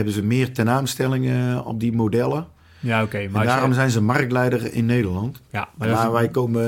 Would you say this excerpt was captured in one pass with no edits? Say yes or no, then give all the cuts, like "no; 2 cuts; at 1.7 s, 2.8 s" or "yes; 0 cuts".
yes; 0 cuts